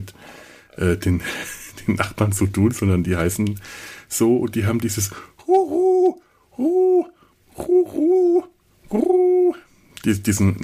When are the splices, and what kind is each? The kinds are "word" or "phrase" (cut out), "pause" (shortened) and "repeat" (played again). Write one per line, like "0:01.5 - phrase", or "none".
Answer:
none